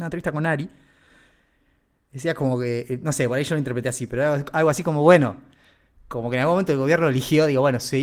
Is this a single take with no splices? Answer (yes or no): yes